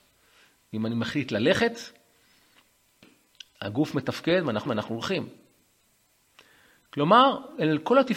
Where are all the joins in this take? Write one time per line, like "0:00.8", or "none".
0:04.7